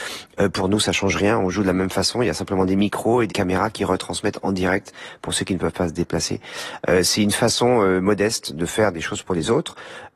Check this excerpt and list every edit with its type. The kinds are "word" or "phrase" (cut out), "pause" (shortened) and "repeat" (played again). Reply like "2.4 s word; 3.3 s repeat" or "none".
3.3 s word